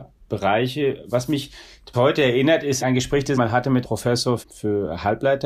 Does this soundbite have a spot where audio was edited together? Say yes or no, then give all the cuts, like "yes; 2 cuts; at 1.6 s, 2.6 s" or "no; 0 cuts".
yes; 5 cuts; at 1.9 s, 2.8 s, 3.3 s, 3.8 s, 4.4 s